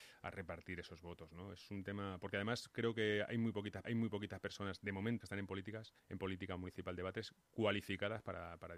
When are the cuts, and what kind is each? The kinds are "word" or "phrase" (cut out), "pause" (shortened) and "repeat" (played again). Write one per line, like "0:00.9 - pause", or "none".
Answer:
0:03.8 - repeat
0:05.2 - phrase
0:06.0 - pause